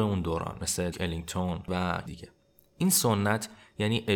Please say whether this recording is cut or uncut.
cut